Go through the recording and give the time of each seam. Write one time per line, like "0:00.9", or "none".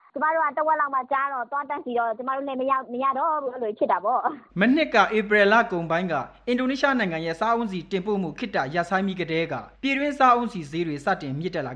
0:04.5
0:09.7